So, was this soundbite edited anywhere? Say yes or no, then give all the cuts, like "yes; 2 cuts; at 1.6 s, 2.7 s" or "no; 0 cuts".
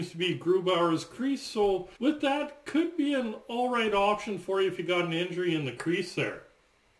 yes; 1 cut; at 2.0 s